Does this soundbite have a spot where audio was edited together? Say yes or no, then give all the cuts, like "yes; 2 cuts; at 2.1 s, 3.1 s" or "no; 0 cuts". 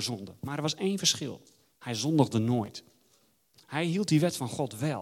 no; 0 cuts